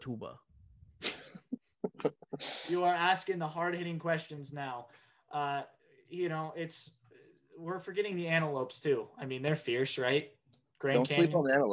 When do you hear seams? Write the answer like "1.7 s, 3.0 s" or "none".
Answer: none